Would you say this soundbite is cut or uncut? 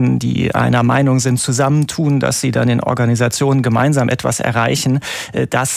uncut